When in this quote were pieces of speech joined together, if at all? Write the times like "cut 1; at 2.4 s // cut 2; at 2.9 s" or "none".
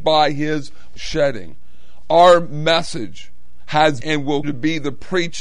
cut 1; at 0.9 s // cut 2; at 4.0 s // cut 3; at 4.4 s